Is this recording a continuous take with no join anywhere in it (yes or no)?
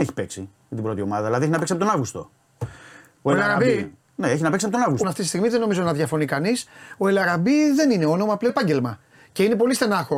no